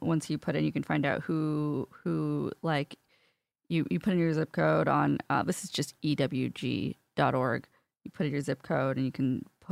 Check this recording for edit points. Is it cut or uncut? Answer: uncut